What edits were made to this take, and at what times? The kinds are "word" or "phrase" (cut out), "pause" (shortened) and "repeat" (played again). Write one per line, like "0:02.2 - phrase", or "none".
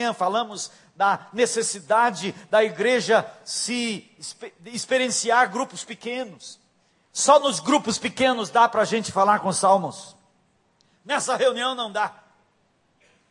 none

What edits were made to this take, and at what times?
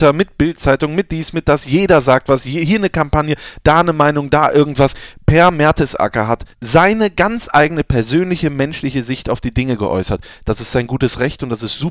0:06.5 - pause

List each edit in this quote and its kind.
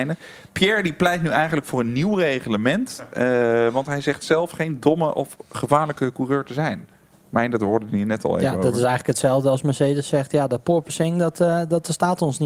none

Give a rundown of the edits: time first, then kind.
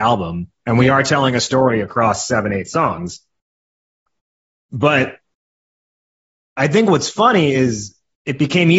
none

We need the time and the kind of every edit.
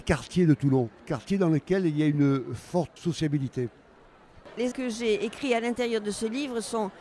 0:00.9 - pause
0:03.0 - word
0:04.7 - word

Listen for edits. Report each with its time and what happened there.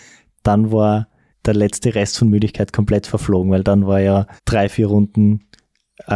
0:01.3 - pause
0:04.4 - pause

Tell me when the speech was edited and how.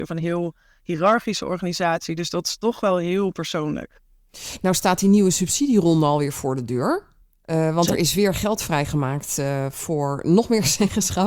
none

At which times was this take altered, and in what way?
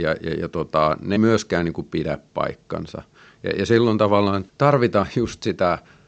0:01.2 - word
0:04.5 - pause

